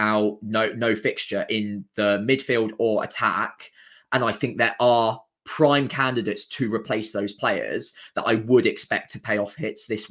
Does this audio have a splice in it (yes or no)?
no